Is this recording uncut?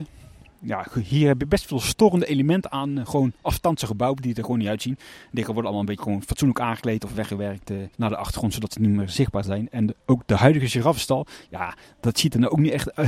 no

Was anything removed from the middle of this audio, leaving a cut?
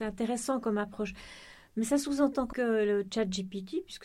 yes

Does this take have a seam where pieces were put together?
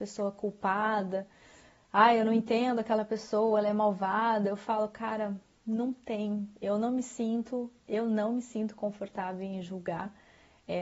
no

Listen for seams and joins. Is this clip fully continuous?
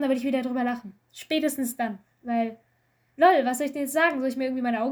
yes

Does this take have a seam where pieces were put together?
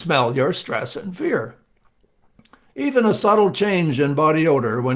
no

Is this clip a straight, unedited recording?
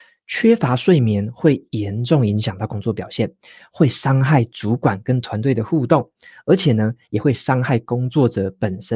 yes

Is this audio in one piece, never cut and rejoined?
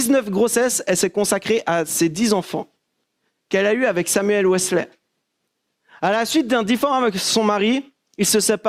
yes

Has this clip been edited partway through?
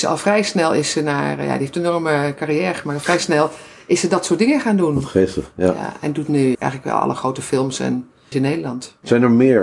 yes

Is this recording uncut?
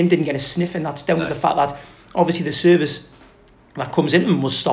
yes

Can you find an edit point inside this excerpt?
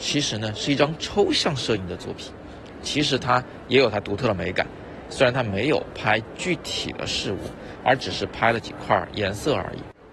yes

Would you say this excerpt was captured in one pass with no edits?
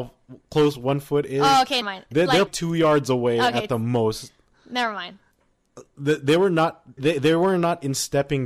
no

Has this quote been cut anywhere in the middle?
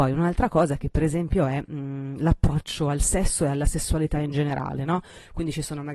no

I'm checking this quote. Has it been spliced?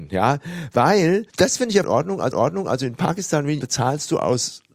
yes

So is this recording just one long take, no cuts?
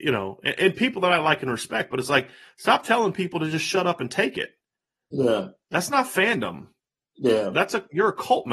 yes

